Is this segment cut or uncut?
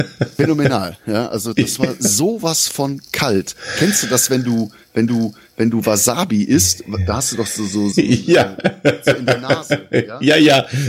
cut